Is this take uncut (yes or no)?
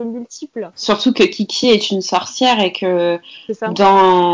yes